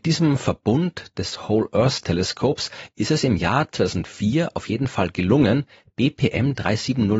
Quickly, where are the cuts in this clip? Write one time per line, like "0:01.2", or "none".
none

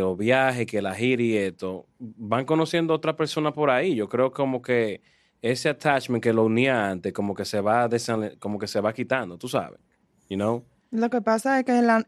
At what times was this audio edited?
0:01.9

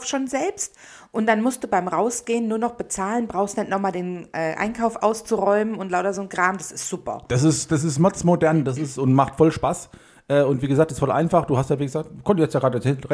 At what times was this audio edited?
none

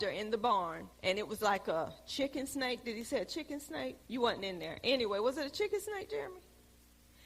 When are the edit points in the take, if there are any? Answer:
0:00.9
0:04.0

